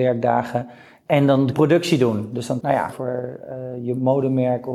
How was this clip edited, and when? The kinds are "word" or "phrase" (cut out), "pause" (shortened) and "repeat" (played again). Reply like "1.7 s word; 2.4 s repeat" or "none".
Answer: 1.5 s phrase; 2.6 s phrase; 2.9 s word